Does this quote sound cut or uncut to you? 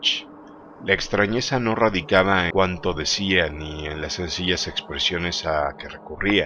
cut